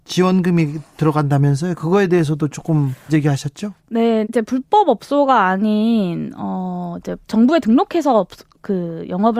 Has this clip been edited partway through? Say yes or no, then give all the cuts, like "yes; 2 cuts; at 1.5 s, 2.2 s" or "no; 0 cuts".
yes; 3 cuts; at 3.1 s, 4.2 s, 7.2 s